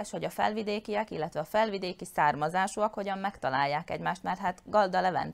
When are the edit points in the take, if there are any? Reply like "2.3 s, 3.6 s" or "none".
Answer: none

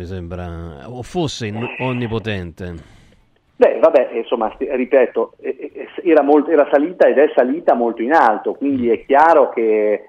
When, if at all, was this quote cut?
none

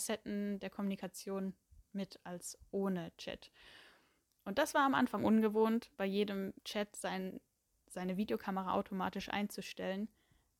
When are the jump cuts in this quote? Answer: 5.9 s, 6.6 s

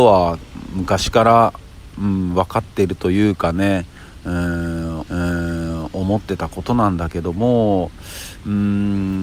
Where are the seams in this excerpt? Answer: 5.1 s

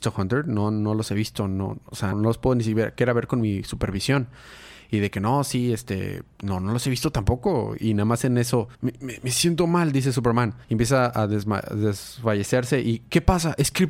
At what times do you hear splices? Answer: 2.1 s, 8.7 s, 10.6 s

